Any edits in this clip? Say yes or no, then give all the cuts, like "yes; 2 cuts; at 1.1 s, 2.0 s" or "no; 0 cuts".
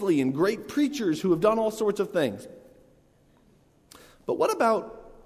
no; 0 cuts